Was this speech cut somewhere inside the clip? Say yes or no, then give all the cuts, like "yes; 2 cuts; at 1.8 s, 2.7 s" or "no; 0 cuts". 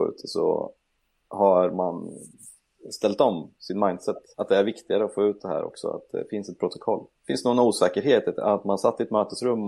yes; 2 cuts; at 4.3 s, 7.2 s